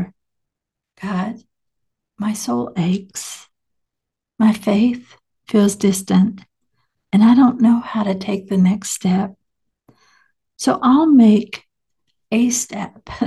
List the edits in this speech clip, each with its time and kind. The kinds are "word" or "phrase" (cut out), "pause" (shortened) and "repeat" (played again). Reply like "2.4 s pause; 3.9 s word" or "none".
none